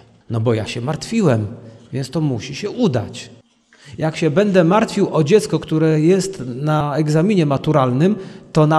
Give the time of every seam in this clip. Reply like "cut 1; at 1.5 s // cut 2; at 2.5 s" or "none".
none